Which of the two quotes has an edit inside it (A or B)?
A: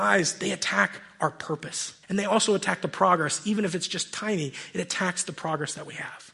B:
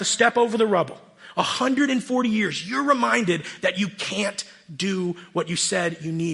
A